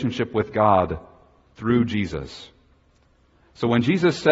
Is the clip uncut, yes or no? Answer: yes